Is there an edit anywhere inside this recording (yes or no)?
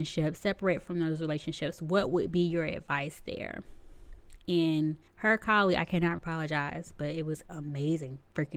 yes